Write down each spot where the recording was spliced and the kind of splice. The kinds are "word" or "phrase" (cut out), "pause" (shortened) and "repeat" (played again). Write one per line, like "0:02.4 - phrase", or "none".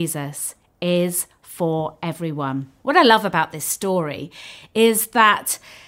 0:02.8 - pause